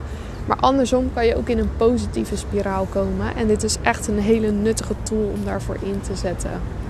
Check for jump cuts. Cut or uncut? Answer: uncut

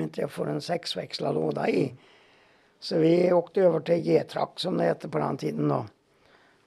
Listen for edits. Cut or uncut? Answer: uncut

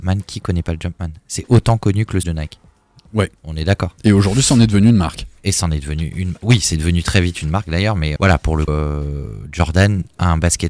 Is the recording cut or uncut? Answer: cut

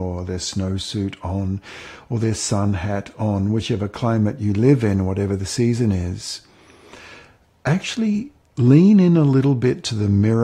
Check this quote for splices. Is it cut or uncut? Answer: uncut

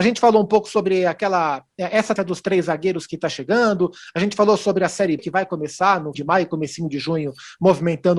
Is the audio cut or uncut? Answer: cut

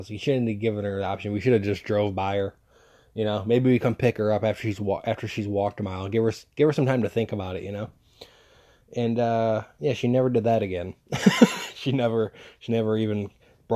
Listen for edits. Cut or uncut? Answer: uncut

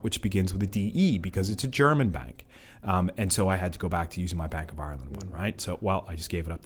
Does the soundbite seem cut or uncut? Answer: uncut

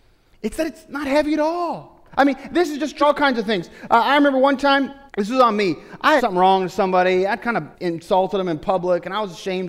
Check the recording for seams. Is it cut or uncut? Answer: cut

